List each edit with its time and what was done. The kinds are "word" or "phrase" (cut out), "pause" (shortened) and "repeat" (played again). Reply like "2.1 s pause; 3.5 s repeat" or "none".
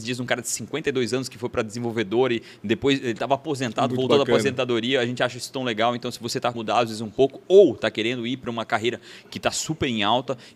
6.5 s word